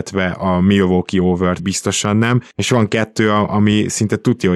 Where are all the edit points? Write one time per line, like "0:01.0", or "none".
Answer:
0:01.6